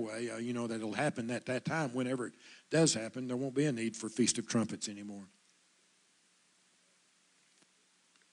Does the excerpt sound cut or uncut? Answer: uncut